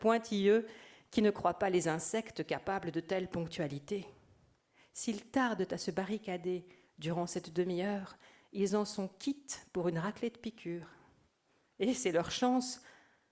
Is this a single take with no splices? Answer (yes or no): yes